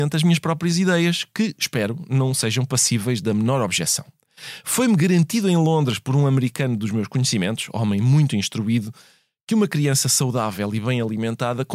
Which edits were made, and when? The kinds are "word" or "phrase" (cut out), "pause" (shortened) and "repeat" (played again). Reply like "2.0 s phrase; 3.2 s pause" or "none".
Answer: none